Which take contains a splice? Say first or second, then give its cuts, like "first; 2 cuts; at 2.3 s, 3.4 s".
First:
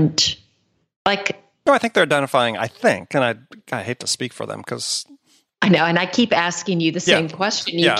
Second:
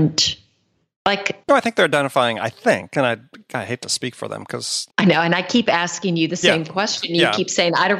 second; 2 cuts; at 1.4 s, 4.9 s